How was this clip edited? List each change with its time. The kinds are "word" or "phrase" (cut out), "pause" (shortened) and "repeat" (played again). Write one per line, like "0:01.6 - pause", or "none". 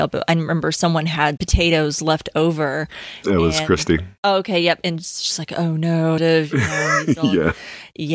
0:01.4 - word
0:04.2 - pause
0:06.2 - phrase